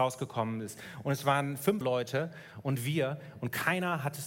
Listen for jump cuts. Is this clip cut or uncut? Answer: cut